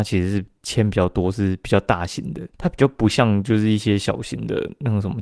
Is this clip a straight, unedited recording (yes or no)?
no